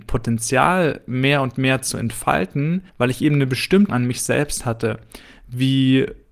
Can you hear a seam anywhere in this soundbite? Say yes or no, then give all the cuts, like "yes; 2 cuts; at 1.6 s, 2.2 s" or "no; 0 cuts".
yes; 2 cuts; at 2.9 s, 3.9 s